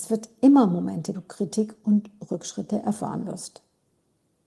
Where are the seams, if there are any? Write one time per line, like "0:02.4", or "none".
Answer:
0:01.1